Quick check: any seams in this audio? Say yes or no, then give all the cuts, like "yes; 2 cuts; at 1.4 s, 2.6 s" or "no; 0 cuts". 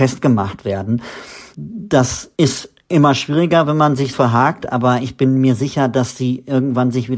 yes; 1 cut; at 4.1 s